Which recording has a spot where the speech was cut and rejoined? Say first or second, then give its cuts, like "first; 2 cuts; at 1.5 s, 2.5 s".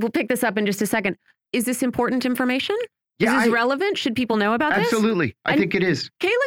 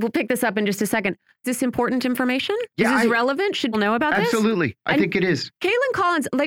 second; 3 cuts; at 1.4 s, 2.7 s, 3.7 s